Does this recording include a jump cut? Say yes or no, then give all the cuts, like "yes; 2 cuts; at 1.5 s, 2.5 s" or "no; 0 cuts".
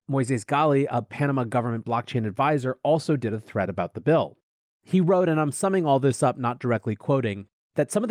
no; 0 cuts